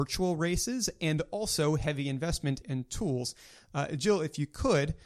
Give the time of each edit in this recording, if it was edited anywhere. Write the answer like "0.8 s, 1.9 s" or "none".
2.6 s